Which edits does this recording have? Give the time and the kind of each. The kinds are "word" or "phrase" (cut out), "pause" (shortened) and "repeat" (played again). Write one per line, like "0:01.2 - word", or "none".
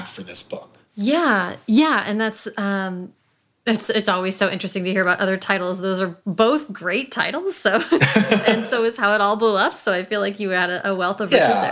none